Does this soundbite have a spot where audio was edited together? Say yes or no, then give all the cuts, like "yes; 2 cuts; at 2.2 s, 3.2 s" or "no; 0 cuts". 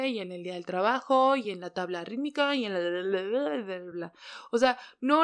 no; 0 cuts